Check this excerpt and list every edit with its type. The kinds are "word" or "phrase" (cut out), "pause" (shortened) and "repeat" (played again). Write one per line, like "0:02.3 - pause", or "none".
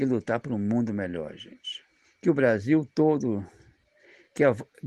0:02.0 - pause